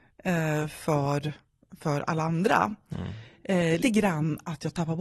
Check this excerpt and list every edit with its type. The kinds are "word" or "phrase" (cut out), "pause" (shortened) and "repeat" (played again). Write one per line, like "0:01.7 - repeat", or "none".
0:03.8 - word